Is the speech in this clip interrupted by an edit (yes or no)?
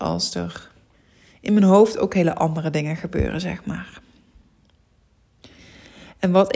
yes